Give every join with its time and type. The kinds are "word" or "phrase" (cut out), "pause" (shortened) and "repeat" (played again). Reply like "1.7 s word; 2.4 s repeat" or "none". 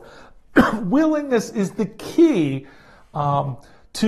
none

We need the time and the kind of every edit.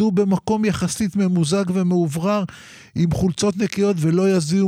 none

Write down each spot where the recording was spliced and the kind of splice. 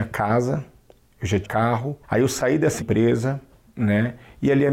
1.4 s word; 2.0 s pause; 2.8 s phrase

